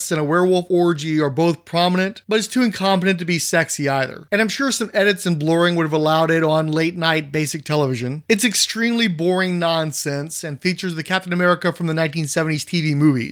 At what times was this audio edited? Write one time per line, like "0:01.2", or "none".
none